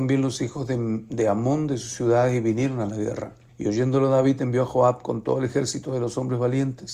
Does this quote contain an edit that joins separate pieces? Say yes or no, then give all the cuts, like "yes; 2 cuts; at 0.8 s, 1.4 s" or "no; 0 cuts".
yes; 1 cut; at 3.5 s